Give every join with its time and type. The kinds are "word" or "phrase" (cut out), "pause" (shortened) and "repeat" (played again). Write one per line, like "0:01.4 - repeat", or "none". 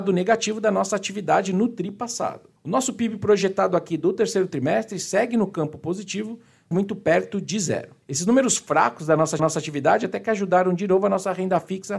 0:02.6 - pause
0:06.7 - word
0:08.0 - pause
0:09.4 - repeat